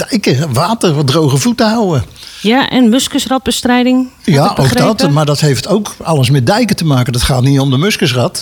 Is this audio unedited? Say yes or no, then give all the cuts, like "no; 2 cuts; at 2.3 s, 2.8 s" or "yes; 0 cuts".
yes; 0 cuts